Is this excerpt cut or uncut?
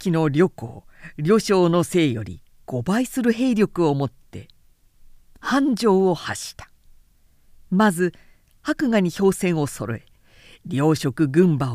uncut